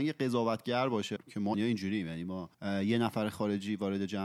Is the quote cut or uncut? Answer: cut